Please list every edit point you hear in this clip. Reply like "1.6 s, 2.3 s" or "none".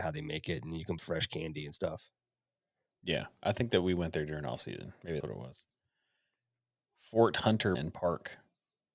1.0 s, 5.2 s, 7.8 s